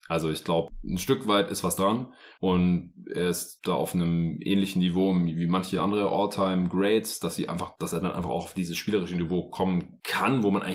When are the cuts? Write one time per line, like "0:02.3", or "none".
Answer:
none